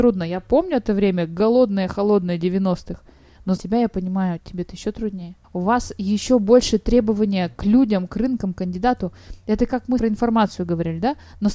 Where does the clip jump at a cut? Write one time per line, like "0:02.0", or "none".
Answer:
0:03.6
0:05.4
0:07.6
0:10.0